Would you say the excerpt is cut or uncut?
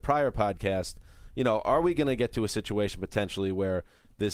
uncut